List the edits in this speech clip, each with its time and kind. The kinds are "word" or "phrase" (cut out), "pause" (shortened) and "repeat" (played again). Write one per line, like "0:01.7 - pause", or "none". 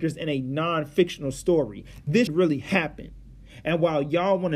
0:02.3 - word